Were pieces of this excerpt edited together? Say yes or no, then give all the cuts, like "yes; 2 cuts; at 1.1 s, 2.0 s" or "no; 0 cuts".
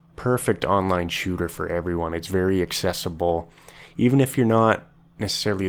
no; 0 cuts